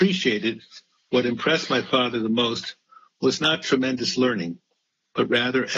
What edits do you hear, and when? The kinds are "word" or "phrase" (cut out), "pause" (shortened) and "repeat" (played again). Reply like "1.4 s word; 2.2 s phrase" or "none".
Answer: none